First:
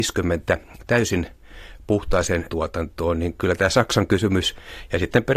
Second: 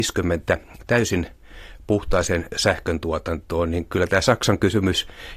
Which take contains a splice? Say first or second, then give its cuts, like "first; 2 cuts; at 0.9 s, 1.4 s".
first; 1 cut; at 2.5 s